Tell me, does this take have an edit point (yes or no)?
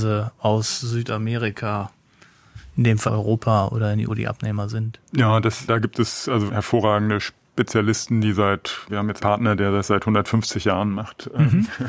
yes